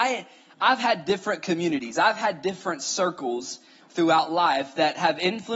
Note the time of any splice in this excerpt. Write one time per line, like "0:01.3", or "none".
none